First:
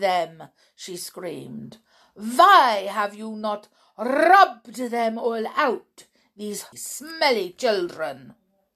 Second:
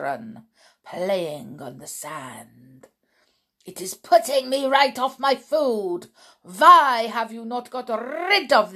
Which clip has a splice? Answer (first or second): first